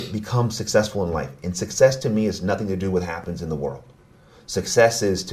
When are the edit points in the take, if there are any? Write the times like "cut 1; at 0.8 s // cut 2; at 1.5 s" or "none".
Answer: none